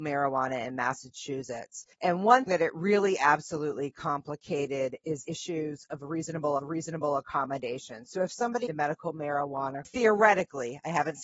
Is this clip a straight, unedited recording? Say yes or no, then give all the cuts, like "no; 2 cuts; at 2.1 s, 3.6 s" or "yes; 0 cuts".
no; 6 cuts; at 1.9 s, 2.5 s, 5.2 s, 6.6 s, 8.7 s, 9.8 s